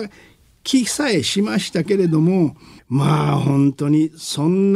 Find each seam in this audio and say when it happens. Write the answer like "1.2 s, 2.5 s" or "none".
2.8 s

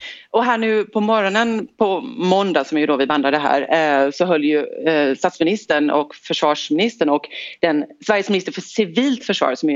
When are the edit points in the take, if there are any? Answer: none

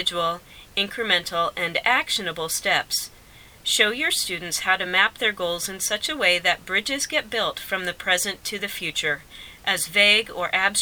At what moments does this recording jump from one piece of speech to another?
none

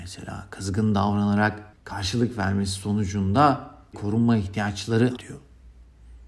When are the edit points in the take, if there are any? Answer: 1.7 s, 3.9 s, 5.2 s

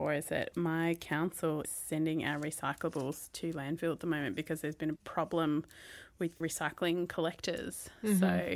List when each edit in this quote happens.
1.6 s, 5.0 s, 6.4 s

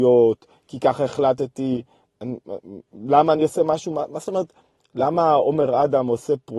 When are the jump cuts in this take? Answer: none

